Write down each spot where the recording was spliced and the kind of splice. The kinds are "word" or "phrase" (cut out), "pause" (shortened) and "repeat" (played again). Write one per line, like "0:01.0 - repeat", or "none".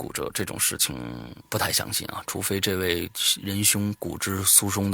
0:01.4 - pause